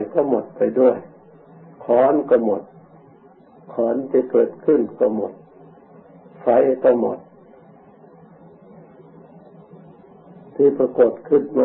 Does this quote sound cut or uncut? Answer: uncut